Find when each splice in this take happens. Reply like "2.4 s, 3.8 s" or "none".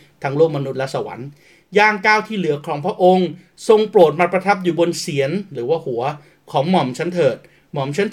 none